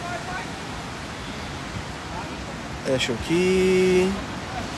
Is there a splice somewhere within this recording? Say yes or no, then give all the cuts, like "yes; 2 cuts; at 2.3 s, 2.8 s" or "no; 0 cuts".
yes; 1 cut; at 3.2 s